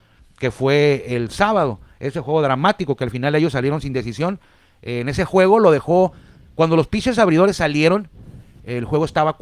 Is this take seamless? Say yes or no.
yes